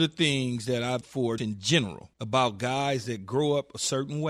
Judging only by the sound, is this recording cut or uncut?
cut